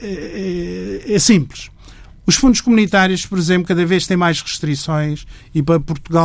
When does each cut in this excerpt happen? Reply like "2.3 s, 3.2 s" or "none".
none